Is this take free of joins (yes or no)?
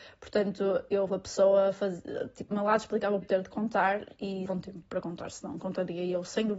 no